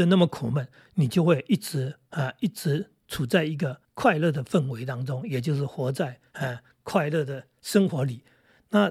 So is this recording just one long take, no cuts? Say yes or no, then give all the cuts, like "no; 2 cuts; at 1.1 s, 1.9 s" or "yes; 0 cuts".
no; 1 cut; at 3.8 s